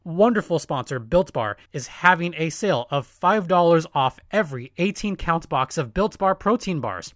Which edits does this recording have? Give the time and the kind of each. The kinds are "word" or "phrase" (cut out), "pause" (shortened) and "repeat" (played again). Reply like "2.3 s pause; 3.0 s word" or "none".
1.7 s pause